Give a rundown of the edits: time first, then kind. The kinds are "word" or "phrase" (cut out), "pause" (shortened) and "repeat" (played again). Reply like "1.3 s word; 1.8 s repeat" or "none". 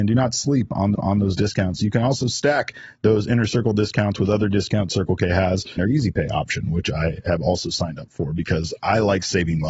0.9 s repeat; 5.8 s phrase